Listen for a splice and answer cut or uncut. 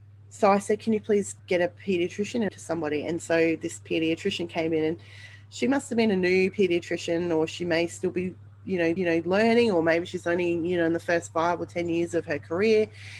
cut